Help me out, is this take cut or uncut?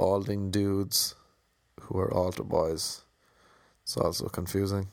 uncut